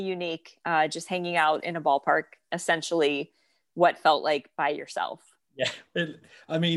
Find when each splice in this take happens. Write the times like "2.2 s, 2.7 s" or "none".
none